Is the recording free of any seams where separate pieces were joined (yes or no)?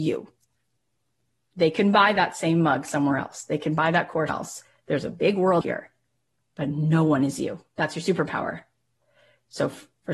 no